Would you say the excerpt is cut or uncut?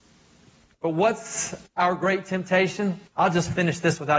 cut